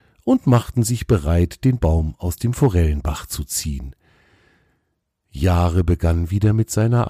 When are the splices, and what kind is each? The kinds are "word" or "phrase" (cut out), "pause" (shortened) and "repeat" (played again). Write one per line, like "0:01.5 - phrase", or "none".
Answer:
none